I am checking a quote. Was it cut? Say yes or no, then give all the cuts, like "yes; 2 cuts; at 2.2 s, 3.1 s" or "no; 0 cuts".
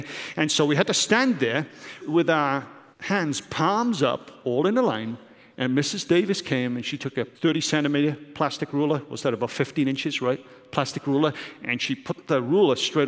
yes; 3 cuts; at 2.0 s, 2.9 s, 7.3 s